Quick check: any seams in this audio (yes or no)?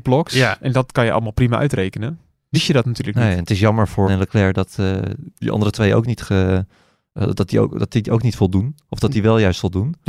yes